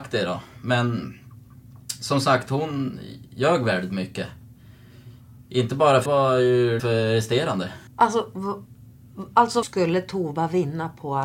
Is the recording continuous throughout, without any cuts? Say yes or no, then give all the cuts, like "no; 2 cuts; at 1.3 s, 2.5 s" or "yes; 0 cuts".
no; 4 cuts; at 6.1 s, 6.8 s, 7.9 s, 9.6 s